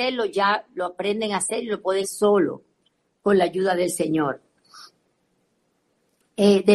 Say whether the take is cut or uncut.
cut